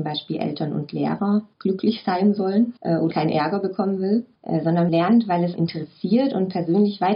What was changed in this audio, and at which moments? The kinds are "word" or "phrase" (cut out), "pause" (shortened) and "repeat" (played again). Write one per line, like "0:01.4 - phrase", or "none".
0:01.5 - pause
0:02.8 - pause
0:03.1 - word
0:04.3 - pause
0:04.9 - word
0:05.6 - word

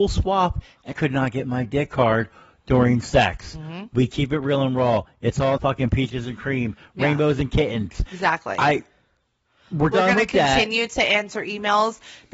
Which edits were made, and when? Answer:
0:00.9 - word
0:05.6 - word

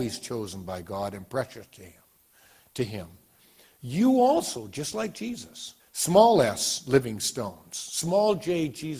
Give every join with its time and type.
0:05.8 - pause

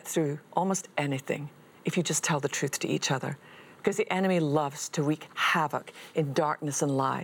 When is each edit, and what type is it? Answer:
none

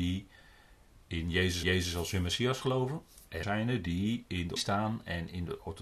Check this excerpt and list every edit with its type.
0:01.6 - repeat
0:03.4 - word
0:04.6 - word

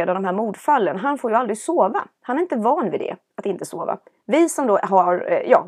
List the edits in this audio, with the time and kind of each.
none

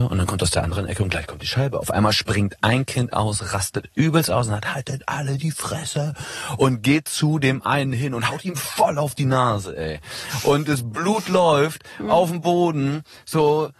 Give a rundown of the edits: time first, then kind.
none

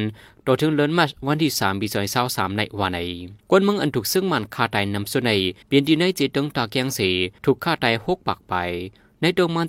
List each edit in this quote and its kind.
0:03.4 - pause
0:05.6 - pause
0:07.4 - pause

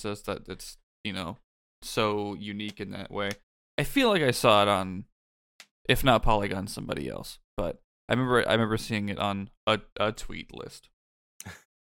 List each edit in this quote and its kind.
none

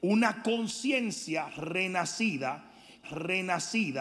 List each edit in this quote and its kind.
0:03.0 - repeat

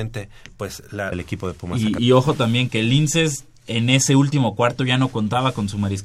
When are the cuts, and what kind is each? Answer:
0:01.1 - phrase
0:02.0 - word
0:02.7 - word

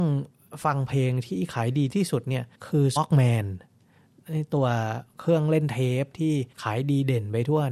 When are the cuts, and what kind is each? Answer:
0:02.5 - pause
0:03.0 - word
0:06.5 - pause

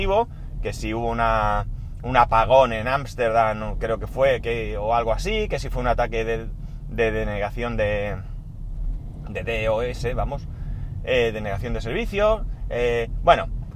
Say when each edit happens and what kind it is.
none

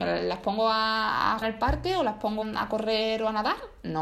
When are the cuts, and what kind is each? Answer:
0:01.4 - word
0:02.4 - word

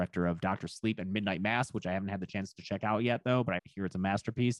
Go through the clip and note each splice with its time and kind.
0:03.6 - word

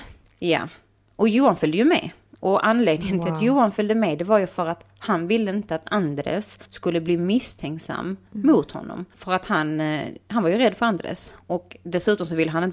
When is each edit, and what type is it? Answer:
0:02.3 - pause
0:06.7 - pause

